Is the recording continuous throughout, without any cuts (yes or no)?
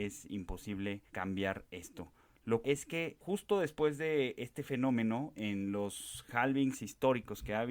no